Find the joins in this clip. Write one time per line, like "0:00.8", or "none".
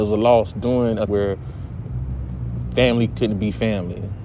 0:01.1
0:03.1